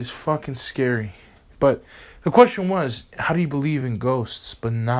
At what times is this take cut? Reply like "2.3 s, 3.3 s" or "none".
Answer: none